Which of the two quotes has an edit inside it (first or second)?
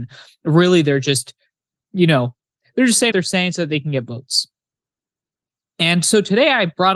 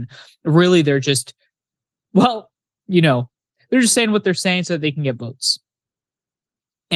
first